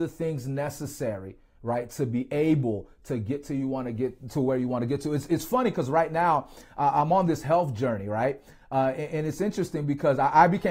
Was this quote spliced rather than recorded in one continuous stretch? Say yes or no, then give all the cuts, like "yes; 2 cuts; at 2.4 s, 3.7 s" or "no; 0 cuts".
no; 0 cuts